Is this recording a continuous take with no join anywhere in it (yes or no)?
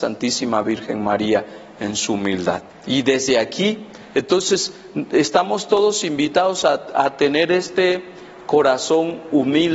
no